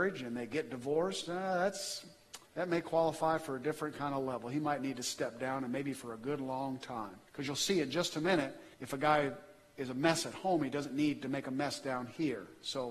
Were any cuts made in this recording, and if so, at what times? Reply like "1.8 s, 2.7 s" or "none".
2.5 s, 7.3 s, 8.7 s